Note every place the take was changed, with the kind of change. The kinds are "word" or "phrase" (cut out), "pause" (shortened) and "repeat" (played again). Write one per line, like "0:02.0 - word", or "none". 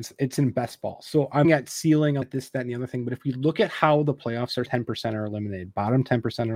0:01.4 - word
0:02.2 - word
0:04.7 - phrase